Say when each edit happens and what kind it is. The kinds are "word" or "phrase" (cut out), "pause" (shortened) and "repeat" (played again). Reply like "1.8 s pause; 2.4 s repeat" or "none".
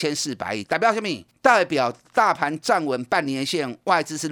1.3 s pause